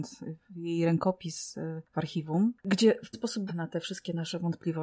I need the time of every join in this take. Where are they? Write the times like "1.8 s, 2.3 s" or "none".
2.6 s, 3.1 s, 3.5 s